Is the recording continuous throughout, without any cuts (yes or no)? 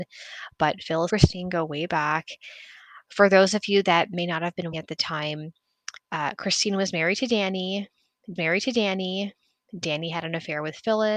no